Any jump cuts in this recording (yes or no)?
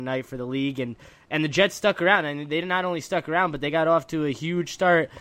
no